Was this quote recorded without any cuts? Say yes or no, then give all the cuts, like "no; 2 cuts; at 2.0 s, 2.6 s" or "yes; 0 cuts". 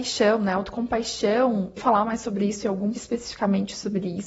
no; 2 cuts; at 1.8 s, 2.9 s